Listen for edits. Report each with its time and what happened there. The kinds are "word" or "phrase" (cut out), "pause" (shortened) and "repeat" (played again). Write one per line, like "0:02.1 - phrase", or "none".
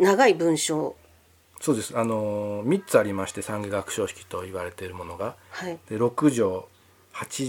none